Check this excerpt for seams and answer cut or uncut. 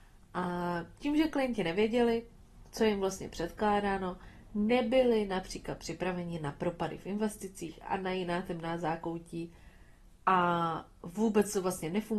uncut